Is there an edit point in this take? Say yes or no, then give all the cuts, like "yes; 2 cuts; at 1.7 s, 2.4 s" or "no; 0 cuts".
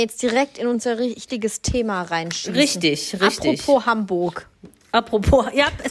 no; 0 cuts